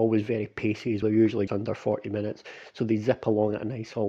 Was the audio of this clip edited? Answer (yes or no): yes